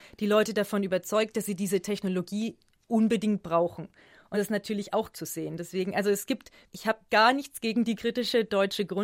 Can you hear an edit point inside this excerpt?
yes; 4 cuts; at 4.3 s, 5.1 s, 7.1 s, 8.0 s

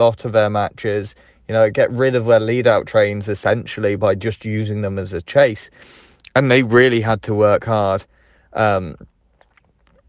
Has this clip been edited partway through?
no; 0 cuts

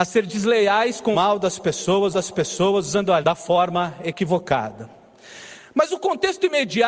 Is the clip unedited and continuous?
no; 3 cuts; at 1.1 s, 2.1 s, 3.2 s

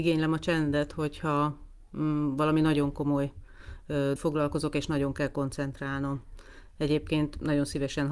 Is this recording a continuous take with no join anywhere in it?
no; 1 cut; at 4.2 s

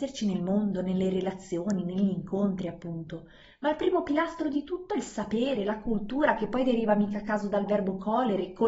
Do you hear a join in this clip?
no; 0 cuts

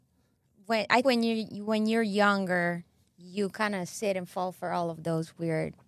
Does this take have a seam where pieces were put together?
yes; 1 cut; at 1.0 s

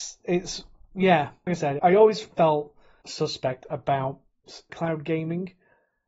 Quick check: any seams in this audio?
yes; 4 cuts; at 1.5 s, 1.8 s, 3.0 s, 4.7 s

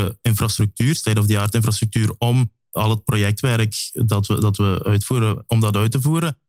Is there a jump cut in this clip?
no; 0 cuts

